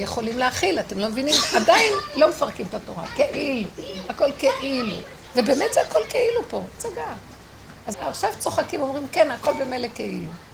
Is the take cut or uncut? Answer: cut